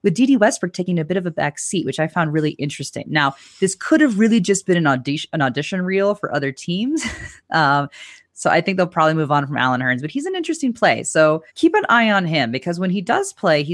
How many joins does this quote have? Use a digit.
1